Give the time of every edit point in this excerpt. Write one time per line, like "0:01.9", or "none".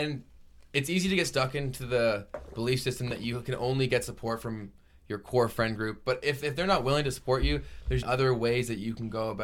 0:08.0